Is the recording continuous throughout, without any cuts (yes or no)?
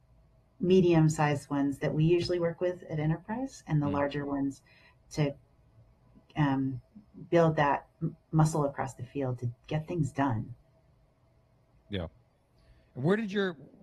yes